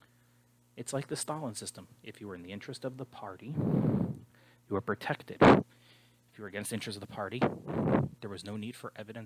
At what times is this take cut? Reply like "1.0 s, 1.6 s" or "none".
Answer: none